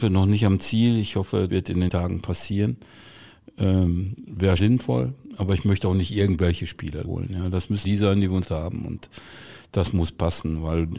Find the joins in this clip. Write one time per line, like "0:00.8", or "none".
0:01.5
0:01.9
0:04.6
0:07.0
0:07.8
0:08.4